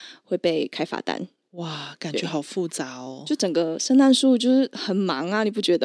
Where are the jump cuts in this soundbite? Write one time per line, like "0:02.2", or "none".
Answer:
none